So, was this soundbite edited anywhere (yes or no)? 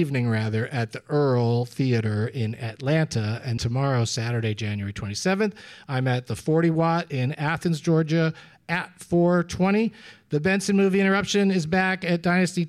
yes